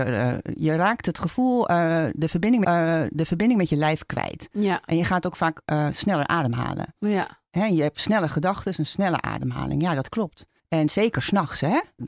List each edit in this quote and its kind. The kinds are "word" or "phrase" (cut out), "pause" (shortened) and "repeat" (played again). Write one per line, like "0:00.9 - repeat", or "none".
0:02.6 - repeat
0:10.6 - pause